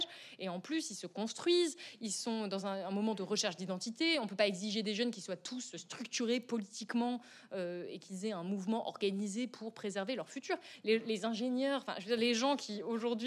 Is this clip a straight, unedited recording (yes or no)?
yes